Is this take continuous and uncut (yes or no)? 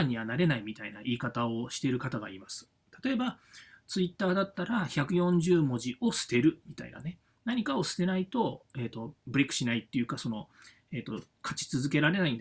yes